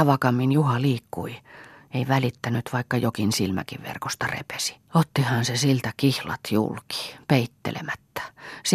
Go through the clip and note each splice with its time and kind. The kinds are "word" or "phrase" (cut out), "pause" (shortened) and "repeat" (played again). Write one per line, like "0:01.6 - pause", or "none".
0:04.8 - pause